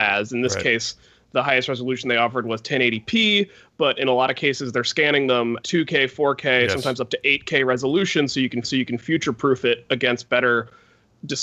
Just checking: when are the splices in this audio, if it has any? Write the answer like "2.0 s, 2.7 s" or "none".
5.6 s, 8.6 s